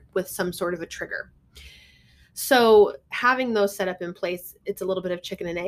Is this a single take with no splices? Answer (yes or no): yes